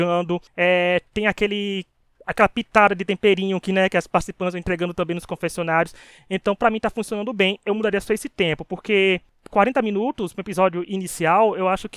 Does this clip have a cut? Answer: no; 0 cuts

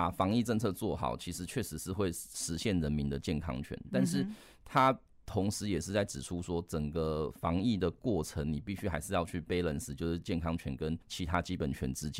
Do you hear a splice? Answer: yes; 1 cut; at 11.0 s

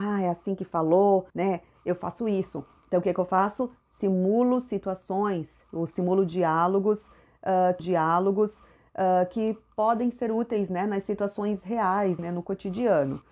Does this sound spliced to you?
yes; 3 cuts; at 1.3 s, 7.8 s, 12.2 s

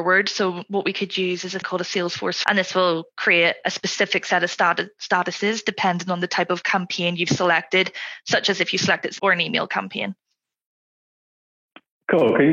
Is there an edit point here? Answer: yes; 3 cuts; at 1.6 s, 2.4 s, 9.2 s

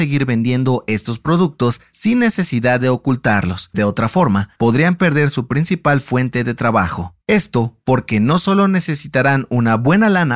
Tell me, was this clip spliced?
yes; 3 cuts; at 3.7 s, 4.6 s, 7.2 s

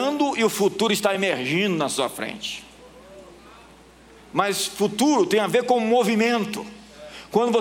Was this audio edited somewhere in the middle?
no; 0 cuts

